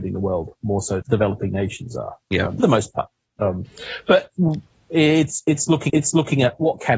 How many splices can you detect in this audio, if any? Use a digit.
3